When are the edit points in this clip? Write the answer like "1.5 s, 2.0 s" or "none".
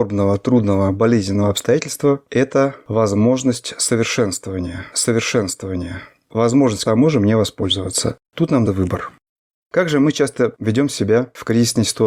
4.9 s, 6.9 s, 8.2 s, 8.7 s